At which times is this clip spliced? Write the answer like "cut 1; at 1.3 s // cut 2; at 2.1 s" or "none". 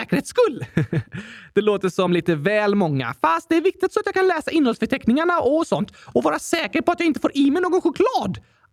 none

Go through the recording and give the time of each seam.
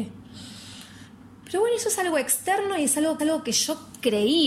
cut 1; at 3.2 s

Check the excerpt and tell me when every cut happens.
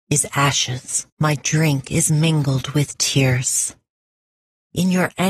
cut 1; at 1.1 s

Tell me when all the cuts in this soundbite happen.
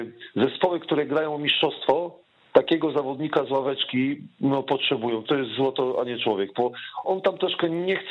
cut 1; at 5.3 s // cut 2; at 7.0 s

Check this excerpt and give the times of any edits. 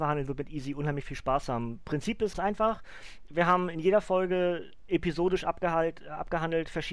cut 1; at 2.3 s

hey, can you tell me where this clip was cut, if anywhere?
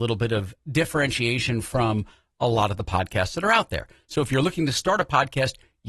none

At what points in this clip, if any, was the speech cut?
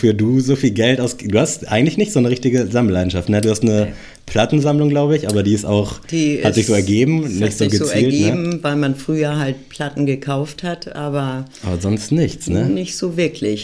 none

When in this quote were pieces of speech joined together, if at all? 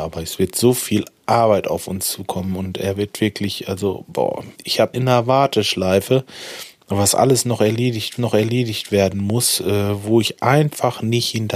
cut 1; at 4.5 s // cut 2; at 4.9 s // cut 3; at 8.2 s

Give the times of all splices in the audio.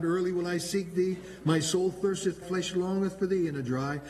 cut 1; at 2.4 s

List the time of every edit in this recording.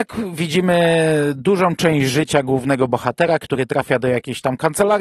none

